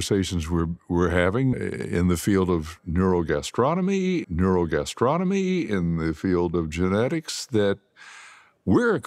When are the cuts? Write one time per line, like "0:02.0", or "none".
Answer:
0:01.5
0:04.2